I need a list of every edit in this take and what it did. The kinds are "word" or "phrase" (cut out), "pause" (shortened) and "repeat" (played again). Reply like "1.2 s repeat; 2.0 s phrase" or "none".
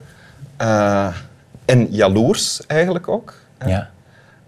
none